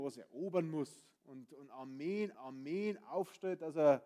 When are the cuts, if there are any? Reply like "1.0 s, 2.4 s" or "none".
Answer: 1.2 s, 2.3 s